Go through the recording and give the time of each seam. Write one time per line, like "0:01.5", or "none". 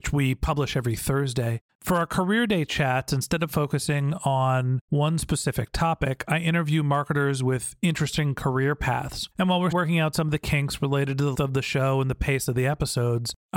0:01.7
0:09.3
0:09.7
0:11.3